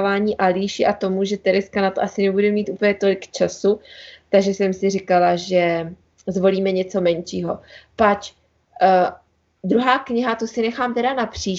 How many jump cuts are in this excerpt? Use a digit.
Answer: 0